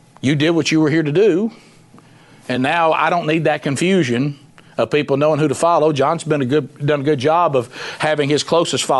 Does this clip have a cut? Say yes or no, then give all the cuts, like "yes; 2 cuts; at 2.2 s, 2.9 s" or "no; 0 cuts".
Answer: no; 0 cuts